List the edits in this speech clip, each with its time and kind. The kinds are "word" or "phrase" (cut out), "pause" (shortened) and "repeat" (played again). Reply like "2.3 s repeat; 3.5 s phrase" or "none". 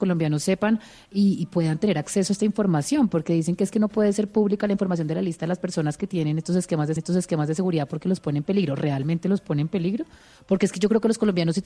7.0 s repeat